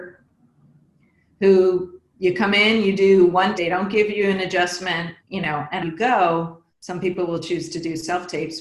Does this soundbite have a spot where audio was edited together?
yes; 4 cuts; at 3.6 s, 5.2 s, 5.8 s, 6.7 s

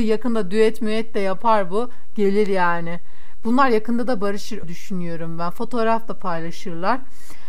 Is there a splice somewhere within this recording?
yes; 1 cut; at 4.6 s

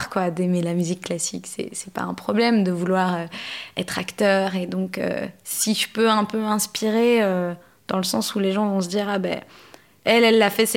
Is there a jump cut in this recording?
no; 0 cuts

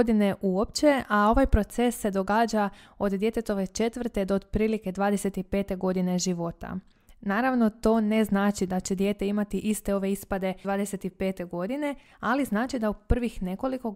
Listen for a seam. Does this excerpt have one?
yes; 1 cut; at 10.6 s

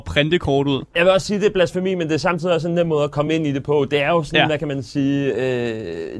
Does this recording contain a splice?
no; 0 cuts

